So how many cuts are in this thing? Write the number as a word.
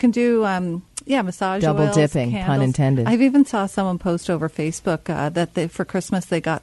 zero